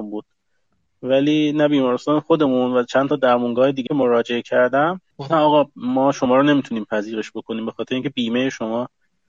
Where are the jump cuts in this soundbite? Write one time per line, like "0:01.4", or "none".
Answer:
0:03.9
0:05.1